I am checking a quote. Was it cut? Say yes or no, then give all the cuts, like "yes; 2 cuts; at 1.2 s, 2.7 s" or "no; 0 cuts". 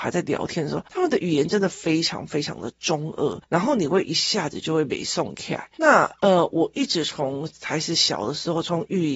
yes; 1 cut; at 5.7 s